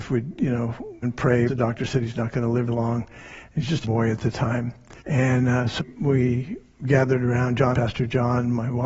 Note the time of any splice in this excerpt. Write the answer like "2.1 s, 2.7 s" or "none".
1.0 s, 1.5 s, 2.7 s, 3.8 s, 5.0 s, 5.8 s, 7.7 s

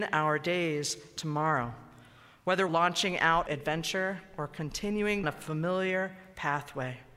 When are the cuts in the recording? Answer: 2.7 s, 3.5 s, 5.2 s

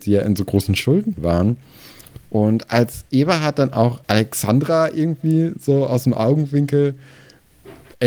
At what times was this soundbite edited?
4.0 s

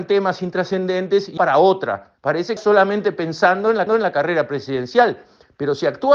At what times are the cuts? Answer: 1.4 s, 2.2 s, 2.6 s, 3.9 s

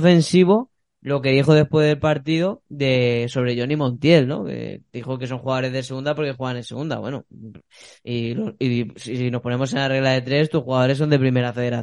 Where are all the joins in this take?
none

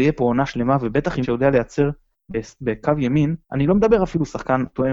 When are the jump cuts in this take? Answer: 1.2 s, 3.4 s

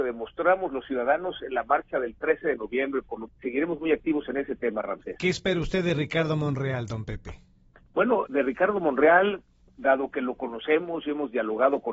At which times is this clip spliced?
3.3 s, 8.3 s, 9.7 s

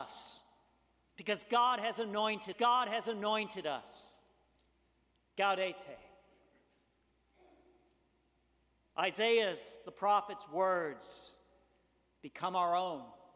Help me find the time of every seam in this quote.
2.5 s

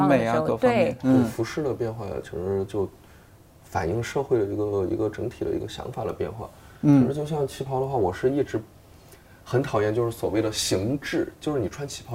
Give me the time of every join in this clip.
none

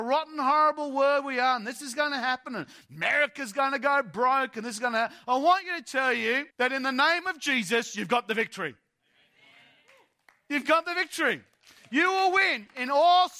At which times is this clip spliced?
6.5 s

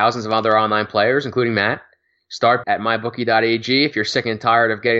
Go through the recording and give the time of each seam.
2.6 s

